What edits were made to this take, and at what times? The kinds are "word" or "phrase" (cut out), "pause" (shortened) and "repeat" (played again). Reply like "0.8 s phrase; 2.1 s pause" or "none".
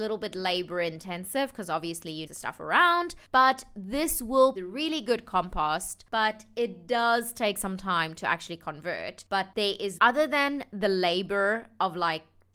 2.3 s phrase; 4.5 s phrase; 10.0 s word